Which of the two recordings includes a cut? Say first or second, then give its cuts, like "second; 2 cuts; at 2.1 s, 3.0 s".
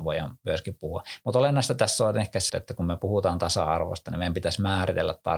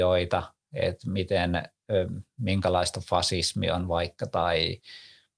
first; 1 cut; at 2.5 s